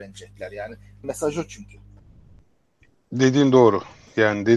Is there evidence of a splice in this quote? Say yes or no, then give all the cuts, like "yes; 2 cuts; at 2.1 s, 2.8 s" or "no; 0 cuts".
yes; 1 cut; at 1.0 s